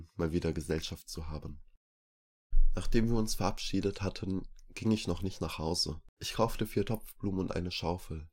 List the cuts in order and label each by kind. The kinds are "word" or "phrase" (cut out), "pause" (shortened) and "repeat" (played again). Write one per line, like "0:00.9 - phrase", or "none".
0:06.1 - pause